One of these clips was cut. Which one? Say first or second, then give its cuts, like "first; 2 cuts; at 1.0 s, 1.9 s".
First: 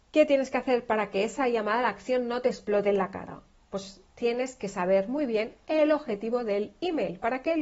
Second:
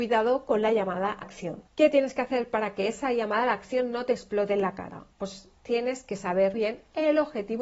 second; 4 cuts; at 1.2 s, 1.7 s, 5.1 s, 6.5 s